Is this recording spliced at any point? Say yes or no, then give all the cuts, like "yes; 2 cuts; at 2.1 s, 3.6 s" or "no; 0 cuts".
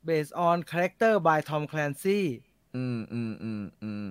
no; 0 cuts